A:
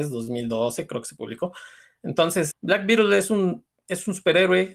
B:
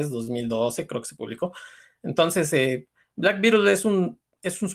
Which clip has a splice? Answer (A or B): A